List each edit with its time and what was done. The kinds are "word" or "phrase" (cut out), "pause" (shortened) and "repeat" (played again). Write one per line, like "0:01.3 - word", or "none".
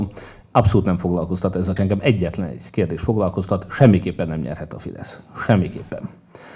0:01.8 - word